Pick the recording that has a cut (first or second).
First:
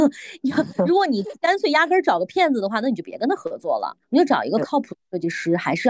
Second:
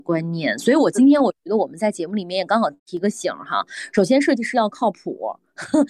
first